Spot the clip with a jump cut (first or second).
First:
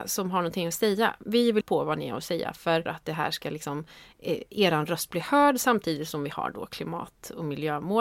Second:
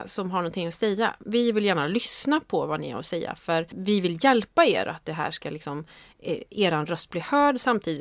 first